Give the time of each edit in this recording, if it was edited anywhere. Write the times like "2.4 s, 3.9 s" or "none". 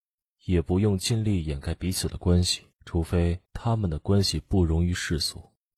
2.7 s, 3.4 s